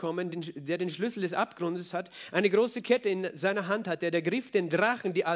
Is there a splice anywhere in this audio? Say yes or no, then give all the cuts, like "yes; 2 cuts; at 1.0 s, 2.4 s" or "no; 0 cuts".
no; 0 cuts